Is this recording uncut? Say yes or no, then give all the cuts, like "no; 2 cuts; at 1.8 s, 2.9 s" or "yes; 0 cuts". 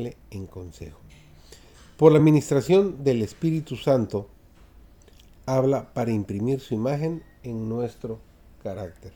yes; 0 cuts